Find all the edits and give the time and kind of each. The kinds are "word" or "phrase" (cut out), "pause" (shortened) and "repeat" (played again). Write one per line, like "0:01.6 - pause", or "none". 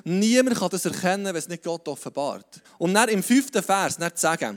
0:02.6 - pause